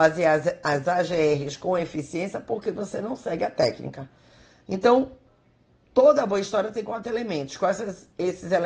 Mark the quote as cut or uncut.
uncut